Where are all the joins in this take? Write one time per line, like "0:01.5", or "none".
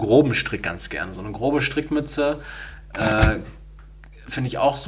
none